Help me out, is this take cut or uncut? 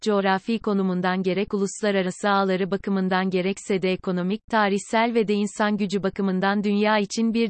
uncut